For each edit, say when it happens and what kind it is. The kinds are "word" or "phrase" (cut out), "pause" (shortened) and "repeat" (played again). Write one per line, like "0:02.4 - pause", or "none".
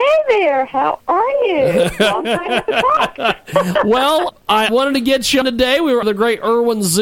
0:04.3 - word
0:04.7 - word
0:05.4 - word
0:06.0 - phrase